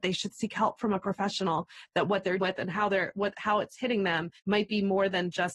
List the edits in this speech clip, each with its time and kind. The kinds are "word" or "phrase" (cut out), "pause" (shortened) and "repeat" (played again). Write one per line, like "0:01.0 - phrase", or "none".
0:02.4 - word
0:04.4 - pause